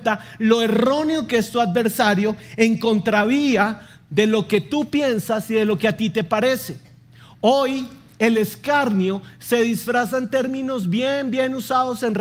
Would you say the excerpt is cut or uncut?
uncut